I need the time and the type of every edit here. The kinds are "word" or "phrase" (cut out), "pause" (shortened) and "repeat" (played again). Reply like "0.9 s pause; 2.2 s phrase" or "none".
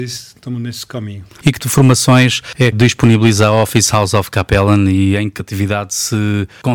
1.6 s word; 2.7 s word; 5.4 s phrase